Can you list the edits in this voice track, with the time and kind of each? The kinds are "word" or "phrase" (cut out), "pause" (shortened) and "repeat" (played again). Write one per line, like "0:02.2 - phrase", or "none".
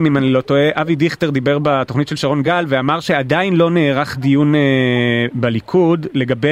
none